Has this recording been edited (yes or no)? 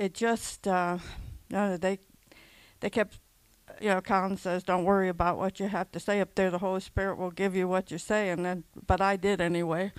no